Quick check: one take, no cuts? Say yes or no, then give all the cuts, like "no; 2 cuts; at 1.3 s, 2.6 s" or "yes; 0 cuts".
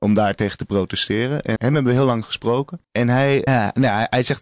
no; 3 cuts; at 1.6 s, 2.8 s, 3.5 s